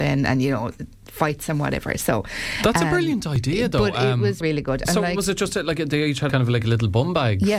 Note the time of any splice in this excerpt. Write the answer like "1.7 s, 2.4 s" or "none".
4.4 s, 6.3 s